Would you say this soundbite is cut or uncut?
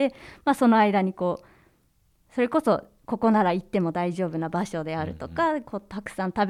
uncut